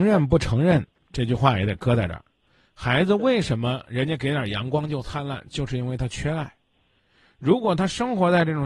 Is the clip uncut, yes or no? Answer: yes